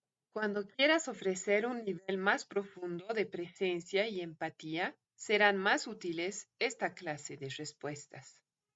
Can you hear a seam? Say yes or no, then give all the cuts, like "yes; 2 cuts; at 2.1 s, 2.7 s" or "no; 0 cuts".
yes; 1 cut; at 5.0 s